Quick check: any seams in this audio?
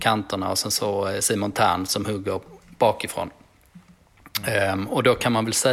no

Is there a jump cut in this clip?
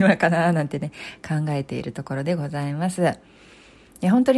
no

